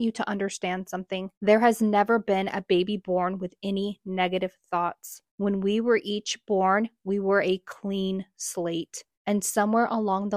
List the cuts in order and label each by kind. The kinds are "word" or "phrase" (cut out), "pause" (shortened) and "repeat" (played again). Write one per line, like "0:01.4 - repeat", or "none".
0:01.3 - pause
0:05.3 - pause
0:09.1 - pause